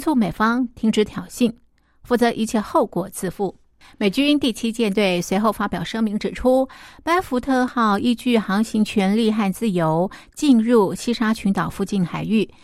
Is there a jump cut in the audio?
no; 0 cuts

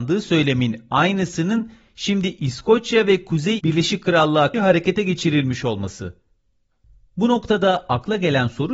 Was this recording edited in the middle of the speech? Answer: yes; 2 cuts; at 3.6 s, 4.5 s

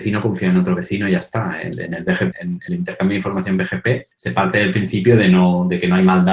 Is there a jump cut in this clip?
yes; 4 cuts; at 1.7 s, 2.3 s, 2.7 s, 4.1 s

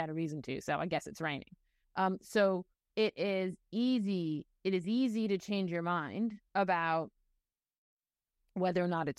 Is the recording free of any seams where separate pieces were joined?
no; 4 cuts; at 1.8 s, 2.7 s, 4.5 s, 6.5 s

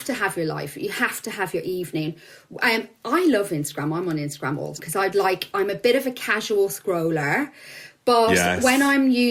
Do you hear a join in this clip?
yes; 2 cuts; at 4.8 s, 5.1 s

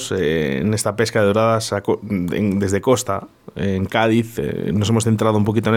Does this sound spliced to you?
no; 0 cuts

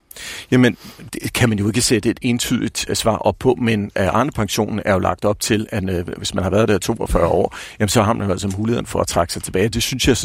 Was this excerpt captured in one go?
no; 2 cuts; at 1.1 s, 2.9 s

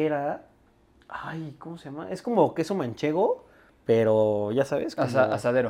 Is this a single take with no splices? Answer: yes; 0 cuts

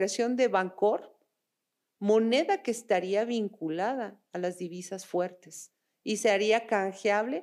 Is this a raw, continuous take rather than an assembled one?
yes; 0 cuts

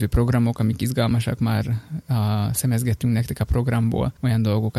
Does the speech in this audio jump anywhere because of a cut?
no; 0 cuts

